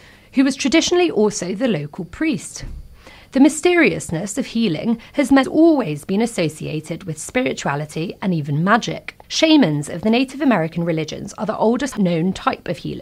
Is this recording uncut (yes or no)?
no